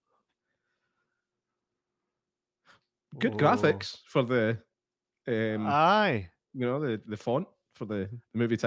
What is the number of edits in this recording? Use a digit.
0